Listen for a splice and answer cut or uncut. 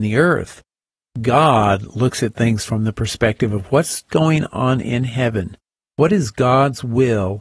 uncut